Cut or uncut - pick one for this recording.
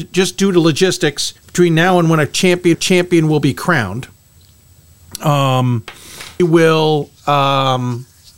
cut